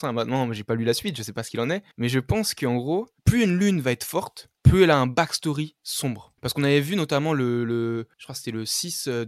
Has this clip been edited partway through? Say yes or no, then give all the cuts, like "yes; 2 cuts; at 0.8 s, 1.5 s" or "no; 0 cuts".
yes; 5 cuts; at 1.9 s, 3.2 s, 4.6 s, 6.4 s, 8.1 s